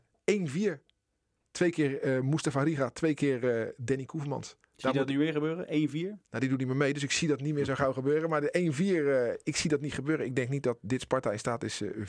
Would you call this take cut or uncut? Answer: uncut